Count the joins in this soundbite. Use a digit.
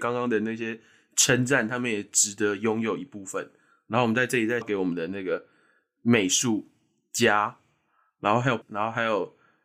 2